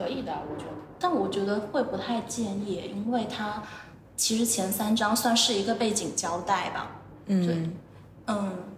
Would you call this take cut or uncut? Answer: uncut